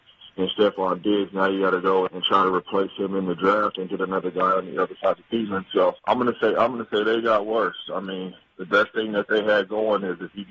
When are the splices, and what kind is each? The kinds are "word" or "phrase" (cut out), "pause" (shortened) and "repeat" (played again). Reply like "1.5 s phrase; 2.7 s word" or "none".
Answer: 2.1 s word; 6.0 s pause